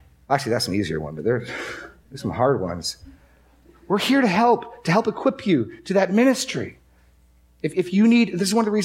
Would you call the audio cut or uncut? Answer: uncut